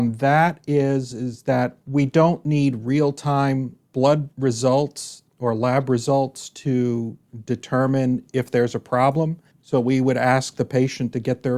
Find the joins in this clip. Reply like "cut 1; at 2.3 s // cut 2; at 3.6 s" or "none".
cut 1; at 5.3 s // cut 2; at 9.5 s